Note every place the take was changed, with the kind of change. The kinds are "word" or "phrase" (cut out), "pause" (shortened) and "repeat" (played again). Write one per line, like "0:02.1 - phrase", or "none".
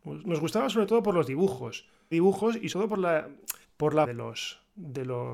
0:02.1 - phrase
0:02.7 - word
0:03.6 - pause
0:04.0 - word